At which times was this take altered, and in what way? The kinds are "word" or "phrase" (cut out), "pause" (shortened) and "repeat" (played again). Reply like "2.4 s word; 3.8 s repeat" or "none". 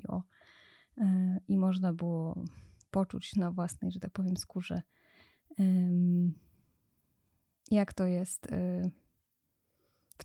none